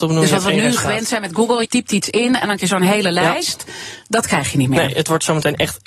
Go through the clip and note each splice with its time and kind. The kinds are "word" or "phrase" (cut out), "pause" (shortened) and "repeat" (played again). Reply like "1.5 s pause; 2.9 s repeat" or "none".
1.6 s word; 2.6 s word